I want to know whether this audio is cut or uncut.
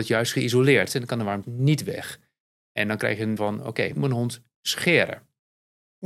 cut